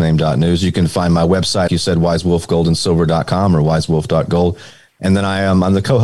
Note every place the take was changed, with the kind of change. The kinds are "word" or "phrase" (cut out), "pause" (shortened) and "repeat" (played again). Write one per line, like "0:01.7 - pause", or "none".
0:01.7 - word